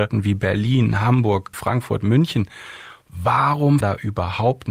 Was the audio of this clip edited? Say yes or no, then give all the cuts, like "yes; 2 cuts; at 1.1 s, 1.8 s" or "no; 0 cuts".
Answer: yes; 2 cuts; at 1.5 s, 3.8 s